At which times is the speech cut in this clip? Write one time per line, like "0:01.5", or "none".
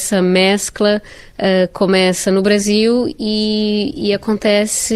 none